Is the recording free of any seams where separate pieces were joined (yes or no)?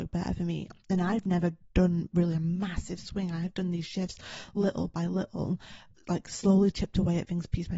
yes